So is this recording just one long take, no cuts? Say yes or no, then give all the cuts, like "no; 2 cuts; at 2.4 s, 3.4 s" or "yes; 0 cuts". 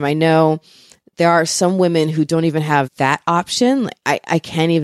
yes; 0 cuts